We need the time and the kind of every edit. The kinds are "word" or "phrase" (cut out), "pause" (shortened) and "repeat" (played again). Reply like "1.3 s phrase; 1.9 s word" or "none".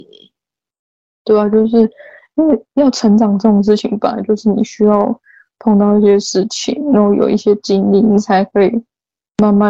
none